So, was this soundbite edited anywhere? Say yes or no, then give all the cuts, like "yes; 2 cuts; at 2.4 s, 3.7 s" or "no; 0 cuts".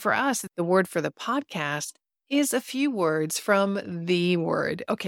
no; 0 cuts